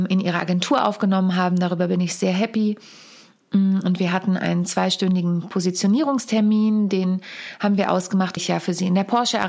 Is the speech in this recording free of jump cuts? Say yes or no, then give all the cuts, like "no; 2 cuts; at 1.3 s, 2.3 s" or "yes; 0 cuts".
no; 1 cut; at 8.4 s